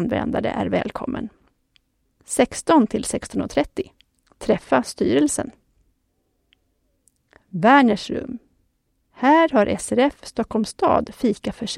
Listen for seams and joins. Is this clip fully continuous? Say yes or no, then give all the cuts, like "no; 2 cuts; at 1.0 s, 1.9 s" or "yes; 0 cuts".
yes; 0 cuts